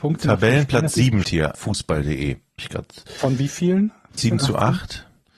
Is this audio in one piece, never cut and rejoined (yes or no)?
no